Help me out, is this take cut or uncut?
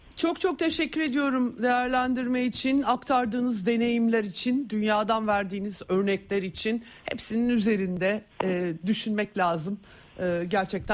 uncut